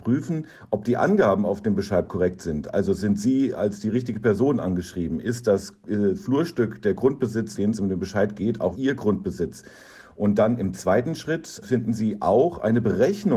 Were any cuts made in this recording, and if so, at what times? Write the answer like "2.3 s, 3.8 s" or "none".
7.5 s, 8.7 s, 11.6 s